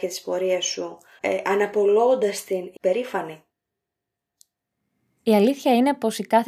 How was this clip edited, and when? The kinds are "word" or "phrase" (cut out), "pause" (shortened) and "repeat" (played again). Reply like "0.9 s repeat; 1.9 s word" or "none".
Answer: 1.2 s phrase; 2.8 s word